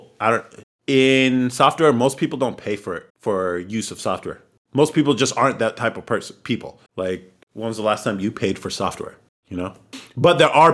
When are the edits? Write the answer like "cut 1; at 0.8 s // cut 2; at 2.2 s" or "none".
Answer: cut 1; at 3.1 s // cut 2; at 6.9 s